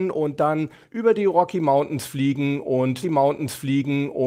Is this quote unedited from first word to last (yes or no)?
no